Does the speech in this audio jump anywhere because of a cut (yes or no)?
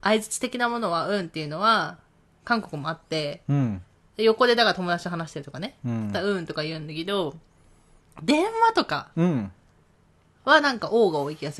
no